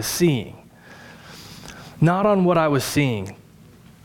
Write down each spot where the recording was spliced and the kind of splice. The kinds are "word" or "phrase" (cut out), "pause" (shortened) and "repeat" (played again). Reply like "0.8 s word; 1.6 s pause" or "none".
none